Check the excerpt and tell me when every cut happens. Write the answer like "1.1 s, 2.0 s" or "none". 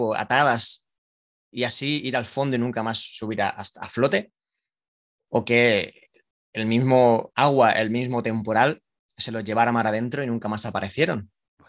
none